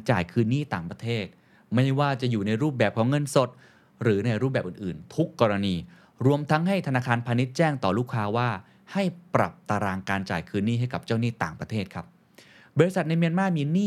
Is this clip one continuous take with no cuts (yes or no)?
yes